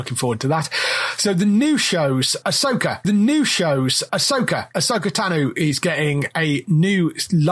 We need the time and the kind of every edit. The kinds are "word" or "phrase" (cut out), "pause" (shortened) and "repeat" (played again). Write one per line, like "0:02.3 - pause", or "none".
0:03.0 - repeat